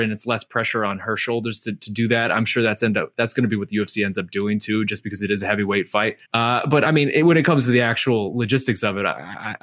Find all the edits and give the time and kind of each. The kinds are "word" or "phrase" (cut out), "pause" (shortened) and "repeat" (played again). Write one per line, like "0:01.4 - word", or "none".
0:06.2 - pause